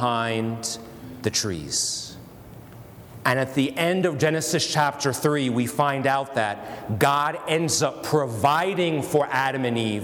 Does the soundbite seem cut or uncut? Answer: uncut